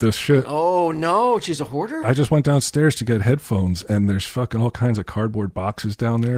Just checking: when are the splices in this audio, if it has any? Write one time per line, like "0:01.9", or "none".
none